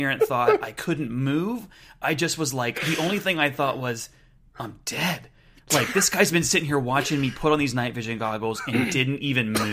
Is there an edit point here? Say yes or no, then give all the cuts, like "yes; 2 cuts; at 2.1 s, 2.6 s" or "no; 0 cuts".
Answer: no; 0 cuts